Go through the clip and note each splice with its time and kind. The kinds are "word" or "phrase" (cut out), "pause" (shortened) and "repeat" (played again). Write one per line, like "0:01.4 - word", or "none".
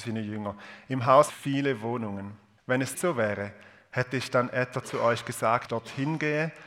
0:01.3 - phrase
0:02.6 - pause
0:02.9 - word
0:05.7 - phrase

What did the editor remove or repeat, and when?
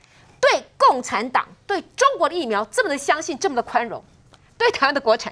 none

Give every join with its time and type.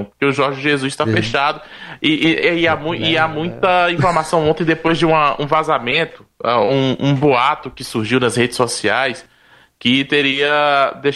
none

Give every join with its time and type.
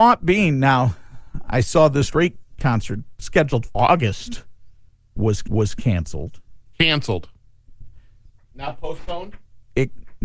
0:02.1 - phrase
0:03.7 - word
0:05.4 - repeat

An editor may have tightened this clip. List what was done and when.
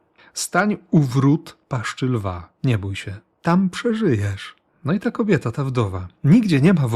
0:02.6 - pause
0:03.3 - pause
0:04.7 - pause

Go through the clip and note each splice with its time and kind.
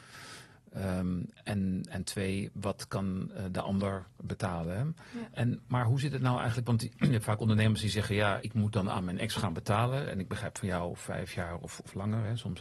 0:08.4 - word

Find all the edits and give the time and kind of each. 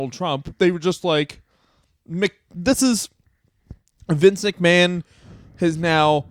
none

